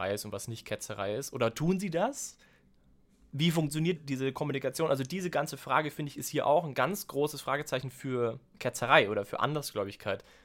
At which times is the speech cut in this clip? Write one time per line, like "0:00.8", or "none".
0:04.0